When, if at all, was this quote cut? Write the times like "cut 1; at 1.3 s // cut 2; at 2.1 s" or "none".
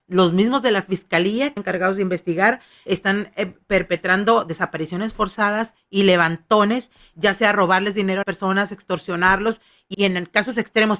cut 1; at 1.6 s // cut 2; at 2.9 s // cut 3; at 7.1 s // cut 4; at 8.2 s // cut 5; at 9.9 s